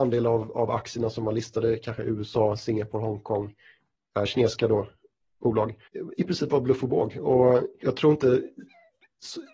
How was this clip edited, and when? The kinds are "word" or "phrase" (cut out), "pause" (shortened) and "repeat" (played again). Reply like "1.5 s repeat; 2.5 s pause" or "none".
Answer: 7.8 s word